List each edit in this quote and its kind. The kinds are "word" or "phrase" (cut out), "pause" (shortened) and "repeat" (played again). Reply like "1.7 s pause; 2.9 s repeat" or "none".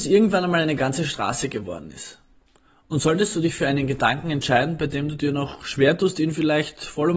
none